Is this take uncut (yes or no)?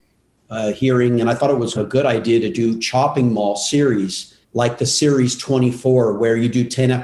no